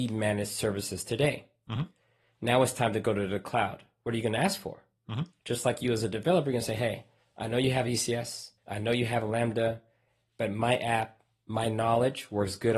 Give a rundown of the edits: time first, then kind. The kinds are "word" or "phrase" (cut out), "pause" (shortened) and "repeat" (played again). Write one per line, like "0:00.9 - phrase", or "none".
0:08.6 - pause